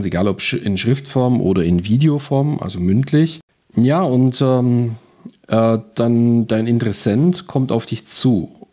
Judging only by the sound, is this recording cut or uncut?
uncut